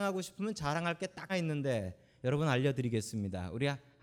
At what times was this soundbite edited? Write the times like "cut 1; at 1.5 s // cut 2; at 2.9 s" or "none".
cut 1; at 1.3 s